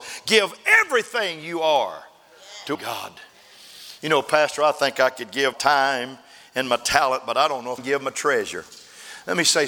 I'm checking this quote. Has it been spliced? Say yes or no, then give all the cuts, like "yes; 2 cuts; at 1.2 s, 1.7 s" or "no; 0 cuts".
yes; 3 cuts; at 2.7 s, 5.5 s, 7.8 s